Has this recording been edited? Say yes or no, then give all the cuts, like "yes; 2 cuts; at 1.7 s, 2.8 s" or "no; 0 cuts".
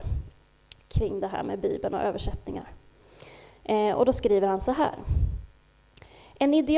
no; 0 cuts